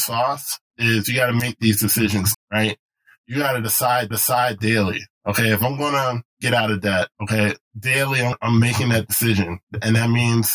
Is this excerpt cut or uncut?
cut